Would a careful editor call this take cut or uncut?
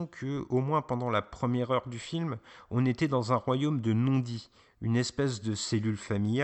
uncut